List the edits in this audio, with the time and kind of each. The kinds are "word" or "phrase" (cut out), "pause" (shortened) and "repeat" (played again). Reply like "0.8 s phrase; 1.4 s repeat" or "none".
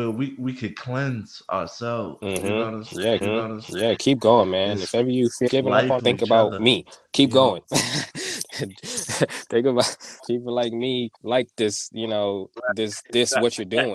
3.2 s repeat; 5.5 s word; 6.0 s word; 10.2 s word; 11.1 s pause; 13.0 s pause